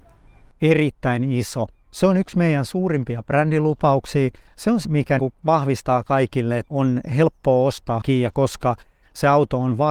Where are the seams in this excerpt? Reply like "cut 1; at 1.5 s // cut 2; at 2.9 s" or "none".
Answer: cut 1; at 4.8 s // cut 2; at 5.2 s // cut 3; at 6.7 s // cut 4; at 8.0 s